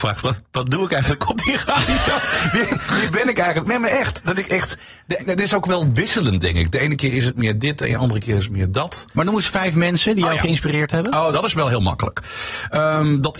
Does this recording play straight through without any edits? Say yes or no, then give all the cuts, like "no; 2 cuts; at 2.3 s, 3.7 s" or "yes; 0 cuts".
no; 2 cuts; at 5.2 s, 11.3 s